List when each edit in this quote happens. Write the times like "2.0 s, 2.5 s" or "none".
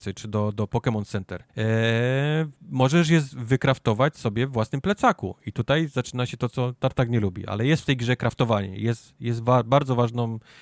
1.5 s, 6.5 s

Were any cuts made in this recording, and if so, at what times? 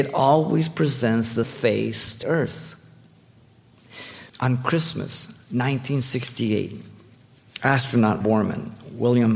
1.4 s, 2.2 s, 4.3 s, 8.2 s

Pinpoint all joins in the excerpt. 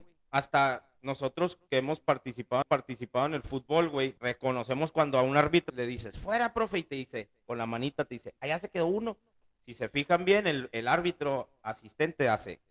2.6 s, 4.2 s, 5.7 s

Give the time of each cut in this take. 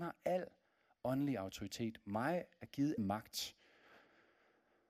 3.0 s

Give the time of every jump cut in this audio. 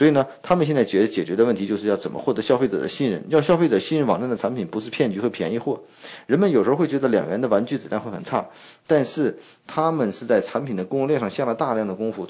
none

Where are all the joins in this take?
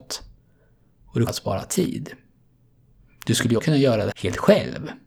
1.3 s, 3.6 s, 4.1 s

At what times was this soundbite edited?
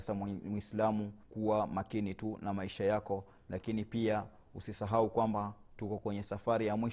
1.2 s

